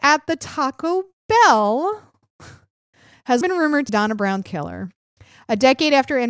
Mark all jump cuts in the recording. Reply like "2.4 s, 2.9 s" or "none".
3.4 s, 3.9 s, 4.4 s